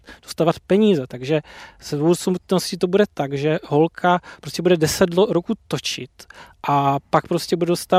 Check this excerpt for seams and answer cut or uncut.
uncut